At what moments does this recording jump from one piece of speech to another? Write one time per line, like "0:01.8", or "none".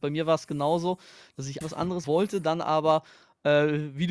0:01.6
0:02.0